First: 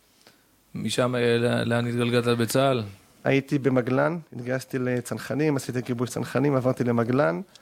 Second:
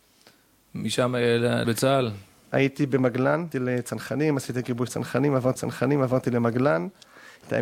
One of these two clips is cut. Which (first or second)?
second